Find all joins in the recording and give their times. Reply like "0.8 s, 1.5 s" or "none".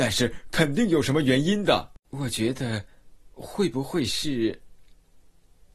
2.0 s